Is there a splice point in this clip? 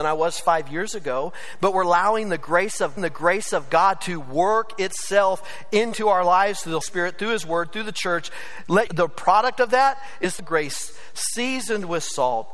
yes; 4 cuts; at 3.0 s, 6.8 s, 8.9 s, 10.4 s

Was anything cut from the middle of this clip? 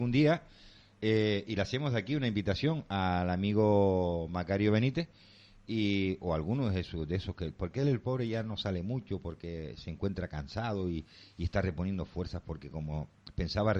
no; 0 cuts

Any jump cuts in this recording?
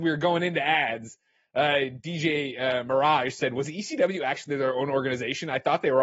no; 0 cuts

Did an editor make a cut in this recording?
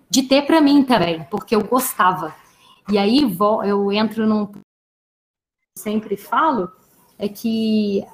no; 0 cuts

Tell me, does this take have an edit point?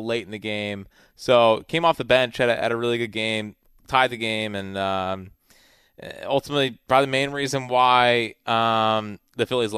no; 0 cuts

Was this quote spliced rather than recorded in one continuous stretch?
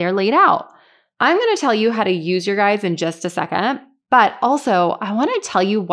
no; 0 cuts

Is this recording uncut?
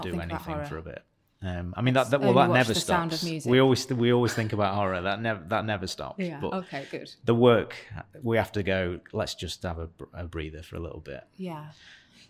yes; 0 cuts

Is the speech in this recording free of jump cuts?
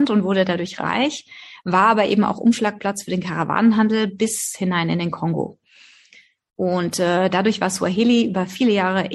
yes; 0 cuts

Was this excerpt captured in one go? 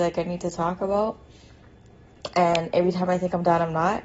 yes; 0 cuts

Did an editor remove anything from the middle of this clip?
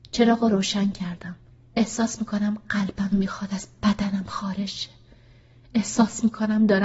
yes; 2 cuts; at 1.5 s, 3.1 s

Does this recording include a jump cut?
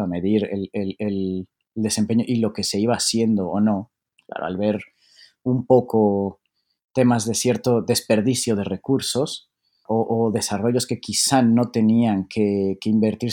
no; 0 cuts

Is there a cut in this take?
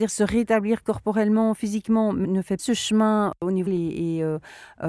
yes; 3 cuts; at 2.2 s, 2.6 s, 3.7 s

